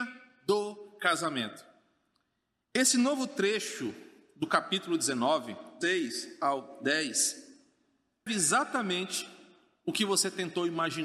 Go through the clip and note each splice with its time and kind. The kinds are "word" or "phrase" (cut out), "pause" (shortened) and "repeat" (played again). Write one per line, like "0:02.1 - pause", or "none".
0:05.8 - word
0:08.3 - word